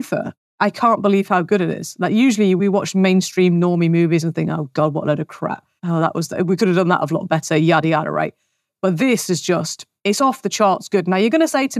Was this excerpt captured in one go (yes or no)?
no